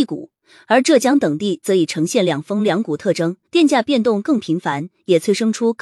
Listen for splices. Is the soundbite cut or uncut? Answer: cut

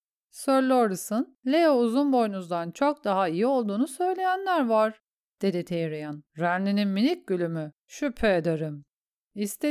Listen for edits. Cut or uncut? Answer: cut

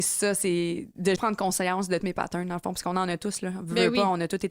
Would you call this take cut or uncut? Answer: cut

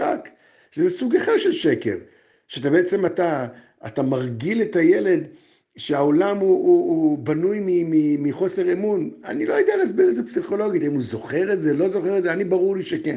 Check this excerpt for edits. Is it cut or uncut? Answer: uncut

